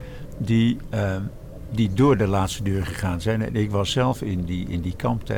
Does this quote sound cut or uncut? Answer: uncut